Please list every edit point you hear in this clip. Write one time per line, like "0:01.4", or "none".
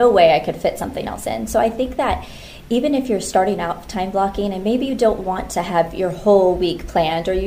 none